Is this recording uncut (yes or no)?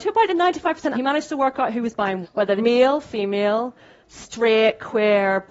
no